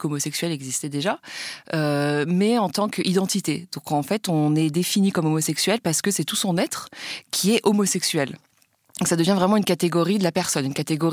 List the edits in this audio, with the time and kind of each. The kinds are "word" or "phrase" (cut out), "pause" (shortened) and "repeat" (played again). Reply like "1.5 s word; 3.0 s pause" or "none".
none

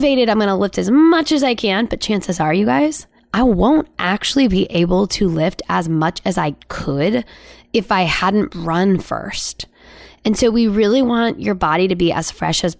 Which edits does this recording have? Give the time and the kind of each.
none

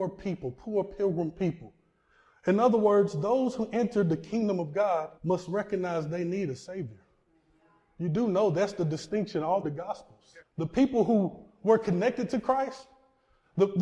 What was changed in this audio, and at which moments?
5.1 s pause; 9.6 s word; 10.4 s pause

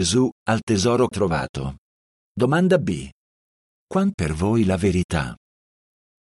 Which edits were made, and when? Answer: 1.1 s word; 4.1 s word

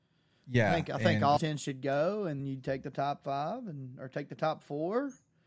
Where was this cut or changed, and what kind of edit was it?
1.4 s word; 2.4 s word

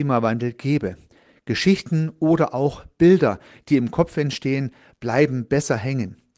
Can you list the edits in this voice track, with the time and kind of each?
none

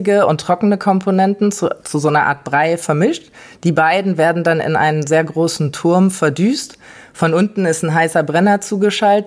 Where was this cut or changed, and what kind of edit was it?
none

